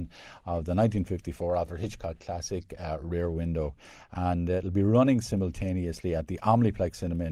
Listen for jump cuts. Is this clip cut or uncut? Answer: uncut